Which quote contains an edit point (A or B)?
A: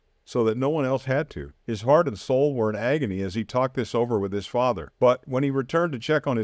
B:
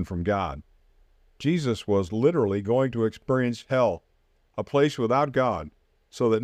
A